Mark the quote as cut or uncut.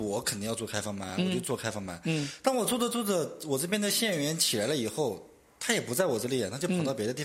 uncut